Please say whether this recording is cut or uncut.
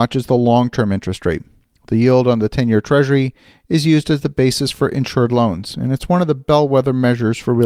uncut